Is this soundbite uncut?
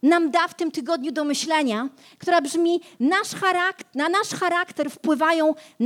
yes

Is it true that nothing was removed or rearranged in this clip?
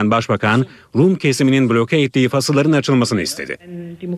yes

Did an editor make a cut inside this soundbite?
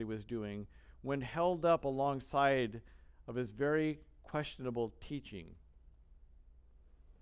no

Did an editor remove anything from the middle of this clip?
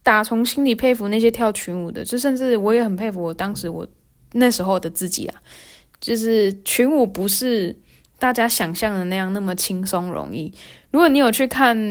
no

